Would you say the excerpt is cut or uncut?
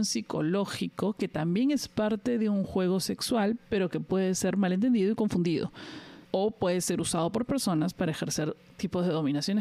cut